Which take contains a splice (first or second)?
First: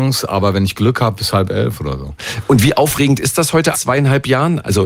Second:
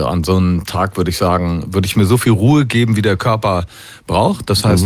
first